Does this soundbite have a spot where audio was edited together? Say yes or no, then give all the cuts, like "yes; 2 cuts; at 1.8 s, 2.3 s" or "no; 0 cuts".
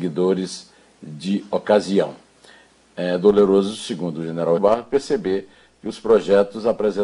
yes; 1 cut; at 4.6 s